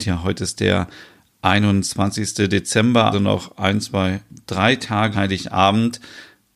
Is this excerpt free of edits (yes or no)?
no